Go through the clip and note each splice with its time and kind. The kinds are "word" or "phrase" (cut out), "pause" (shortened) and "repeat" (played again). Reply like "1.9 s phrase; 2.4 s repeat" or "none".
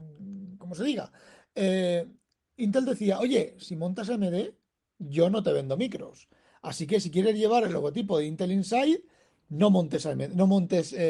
none

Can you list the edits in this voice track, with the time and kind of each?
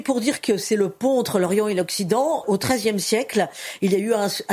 2.4 s word

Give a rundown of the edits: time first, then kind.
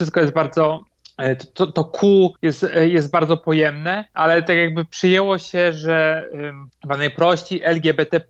2.4 s pause

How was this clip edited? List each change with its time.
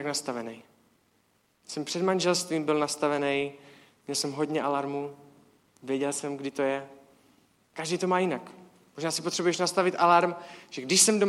none

